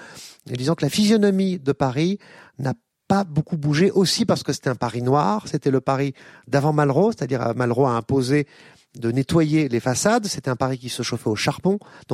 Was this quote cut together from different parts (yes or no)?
no